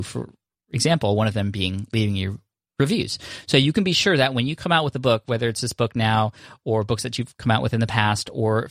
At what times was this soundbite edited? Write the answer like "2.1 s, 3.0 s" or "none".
none